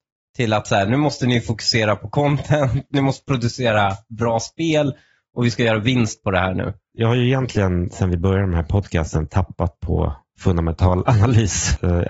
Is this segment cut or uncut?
cut